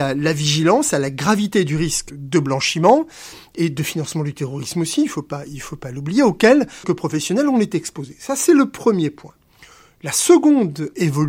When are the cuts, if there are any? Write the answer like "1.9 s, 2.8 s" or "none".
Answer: 2.1 s, 6.8 s